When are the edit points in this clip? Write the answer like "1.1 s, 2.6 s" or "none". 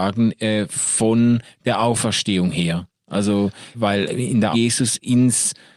3.7 s, 4.5 s